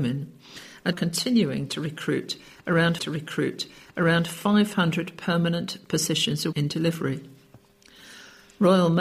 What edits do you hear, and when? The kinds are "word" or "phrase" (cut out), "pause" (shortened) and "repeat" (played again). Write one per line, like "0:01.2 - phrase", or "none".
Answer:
0:00.9 - word
0:03.0 - repeat
0:06.5 - word